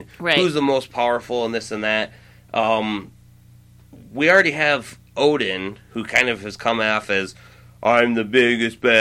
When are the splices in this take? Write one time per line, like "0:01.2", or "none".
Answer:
none